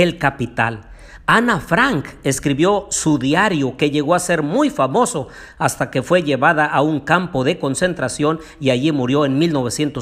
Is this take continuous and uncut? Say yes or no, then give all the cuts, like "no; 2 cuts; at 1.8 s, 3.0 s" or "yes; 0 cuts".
yes; 0 cuts